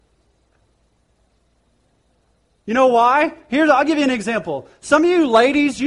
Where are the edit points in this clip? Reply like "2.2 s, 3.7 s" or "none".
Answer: none